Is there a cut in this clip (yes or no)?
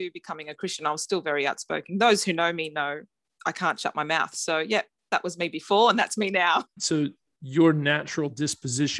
no